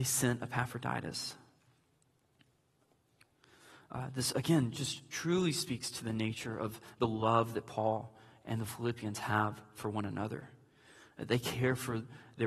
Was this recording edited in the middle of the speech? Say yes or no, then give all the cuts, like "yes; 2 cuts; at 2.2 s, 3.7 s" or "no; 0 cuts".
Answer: no; 0 cuts